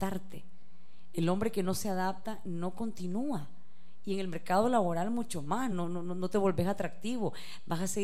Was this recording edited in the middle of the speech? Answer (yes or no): no